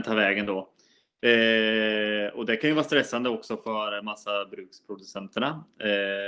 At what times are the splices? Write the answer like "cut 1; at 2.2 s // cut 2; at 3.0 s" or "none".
none